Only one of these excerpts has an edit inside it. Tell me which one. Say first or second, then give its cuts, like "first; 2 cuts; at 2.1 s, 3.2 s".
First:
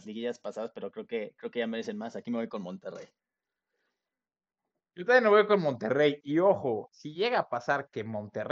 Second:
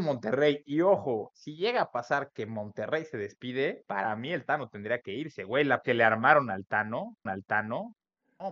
second; 2 cuts; at 5.8 s, 7.3 s